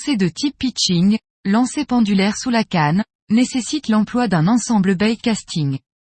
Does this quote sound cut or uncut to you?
uncut